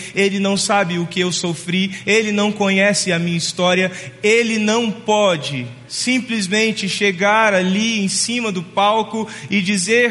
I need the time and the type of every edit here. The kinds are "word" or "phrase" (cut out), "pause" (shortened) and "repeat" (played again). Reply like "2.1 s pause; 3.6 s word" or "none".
none